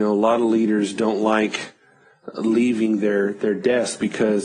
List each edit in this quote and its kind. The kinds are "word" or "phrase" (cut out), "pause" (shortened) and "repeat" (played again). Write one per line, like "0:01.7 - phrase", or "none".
none